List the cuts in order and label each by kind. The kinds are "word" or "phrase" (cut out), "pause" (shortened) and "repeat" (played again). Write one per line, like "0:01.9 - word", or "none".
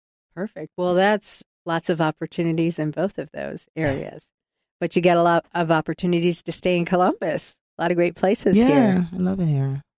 0:01.4 - phrase